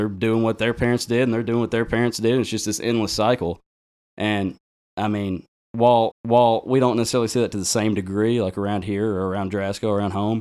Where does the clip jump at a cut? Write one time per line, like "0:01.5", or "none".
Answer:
0:06.1